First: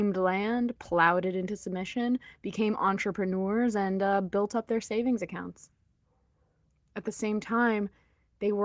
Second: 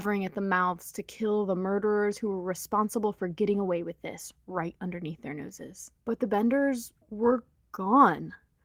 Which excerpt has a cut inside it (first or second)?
second